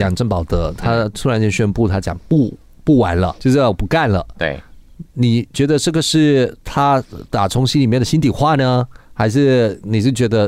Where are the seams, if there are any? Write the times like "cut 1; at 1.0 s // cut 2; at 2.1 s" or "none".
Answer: cut 1; at 3.4 s